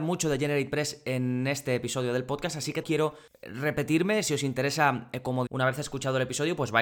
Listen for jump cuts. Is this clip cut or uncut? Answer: cut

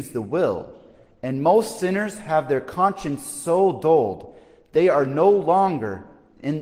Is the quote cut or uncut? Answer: uncut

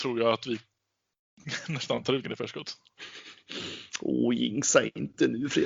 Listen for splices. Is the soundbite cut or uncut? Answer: cut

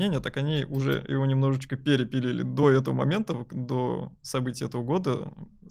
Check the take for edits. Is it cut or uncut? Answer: uncut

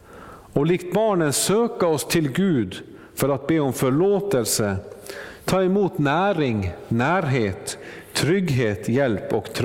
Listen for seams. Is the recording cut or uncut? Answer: uncut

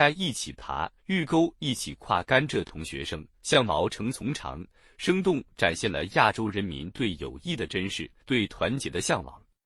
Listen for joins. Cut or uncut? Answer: cut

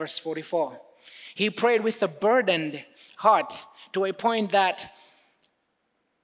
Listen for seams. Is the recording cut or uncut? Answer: uncut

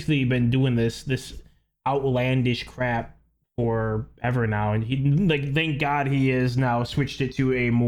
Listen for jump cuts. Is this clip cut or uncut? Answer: uncut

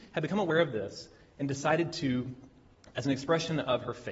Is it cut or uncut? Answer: uncut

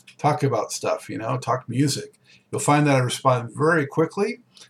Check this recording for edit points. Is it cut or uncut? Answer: uncut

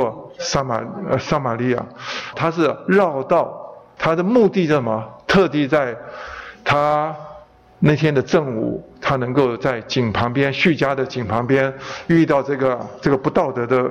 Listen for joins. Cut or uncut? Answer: cut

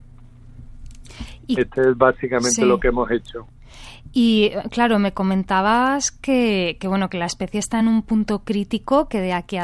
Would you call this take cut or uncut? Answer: uncut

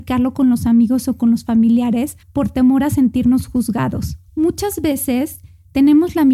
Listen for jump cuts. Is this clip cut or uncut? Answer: cut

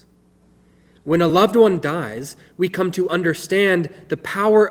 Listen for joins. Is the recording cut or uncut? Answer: uncut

